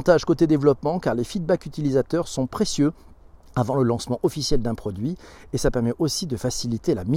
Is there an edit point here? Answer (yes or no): no